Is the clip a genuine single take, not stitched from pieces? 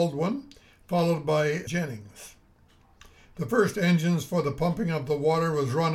no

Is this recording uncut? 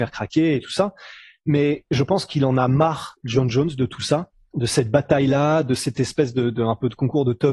yes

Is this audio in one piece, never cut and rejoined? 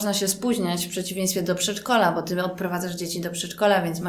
yes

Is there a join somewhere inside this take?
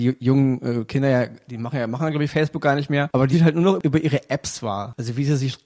yes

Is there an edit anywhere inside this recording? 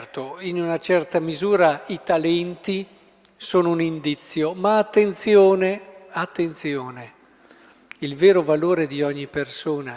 no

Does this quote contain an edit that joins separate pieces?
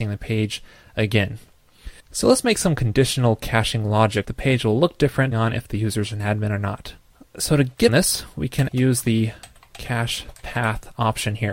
yes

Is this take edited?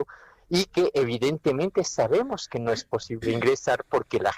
no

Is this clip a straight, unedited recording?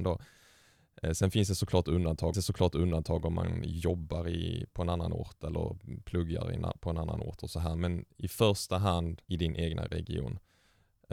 no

